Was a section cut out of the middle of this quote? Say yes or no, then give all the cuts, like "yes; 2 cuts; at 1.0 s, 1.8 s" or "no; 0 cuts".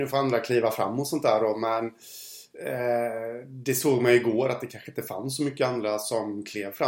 no; 0 cuts